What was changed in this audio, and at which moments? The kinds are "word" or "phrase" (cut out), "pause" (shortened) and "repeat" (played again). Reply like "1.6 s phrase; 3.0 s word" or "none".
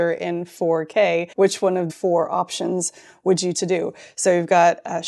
1.3 s pause; 1.9 s word; 3.5 s word